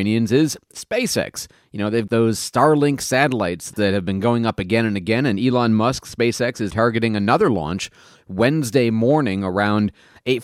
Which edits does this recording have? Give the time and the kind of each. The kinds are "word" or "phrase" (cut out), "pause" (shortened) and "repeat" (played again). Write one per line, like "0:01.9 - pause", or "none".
0:02.1 - word
0:06.7 - word